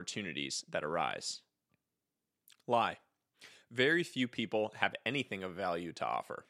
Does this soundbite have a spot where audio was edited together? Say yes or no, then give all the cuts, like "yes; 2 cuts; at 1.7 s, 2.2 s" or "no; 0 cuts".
no; 0 cuts